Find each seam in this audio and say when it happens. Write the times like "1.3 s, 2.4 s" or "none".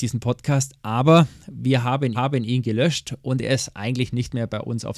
2.1 s